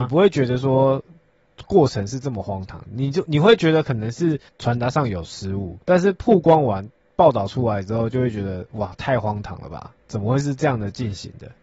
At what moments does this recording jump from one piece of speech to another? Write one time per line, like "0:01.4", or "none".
0:04.5
0:05.8

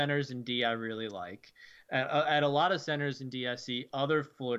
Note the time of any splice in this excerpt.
none

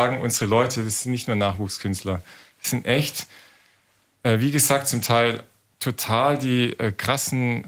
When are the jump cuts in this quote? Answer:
none

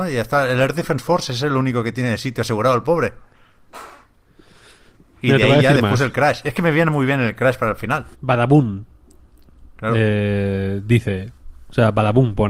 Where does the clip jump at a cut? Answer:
0:08.1

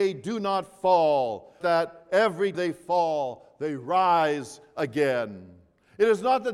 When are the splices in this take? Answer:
0:01.6
0:02.5

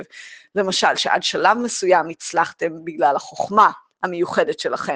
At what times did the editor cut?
none

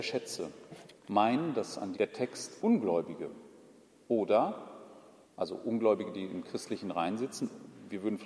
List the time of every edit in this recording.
0:01.0
0:01.9
0:02.6
0:05.2

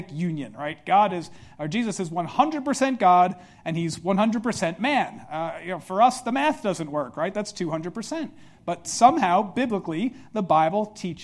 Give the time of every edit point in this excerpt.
none

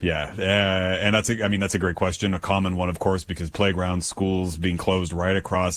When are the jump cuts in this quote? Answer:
none

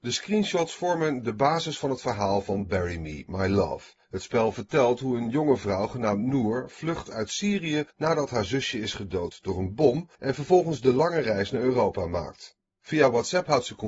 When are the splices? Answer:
0:04.0
0:07.9
0:10.1

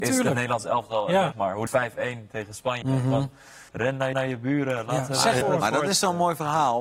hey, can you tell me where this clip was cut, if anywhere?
0:01.3
0:01.7
0:02.8
0:03.7
0:04.1
0:05.4

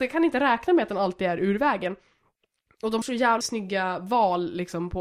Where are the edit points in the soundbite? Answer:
0:03.0
0:03.4

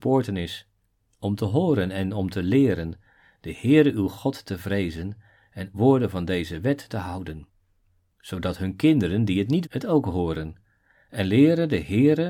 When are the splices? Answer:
0:05.7
0:06.9
0:09.6

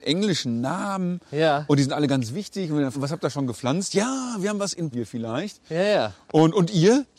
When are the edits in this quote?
0:02.9
0:04.9

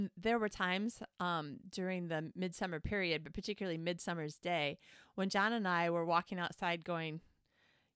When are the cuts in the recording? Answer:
none

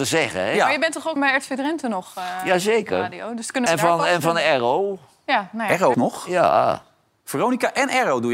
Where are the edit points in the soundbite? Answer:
0:01.2
0:03.7
0:05.9

